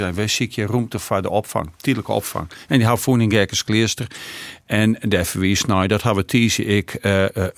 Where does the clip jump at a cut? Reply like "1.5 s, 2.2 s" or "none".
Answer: none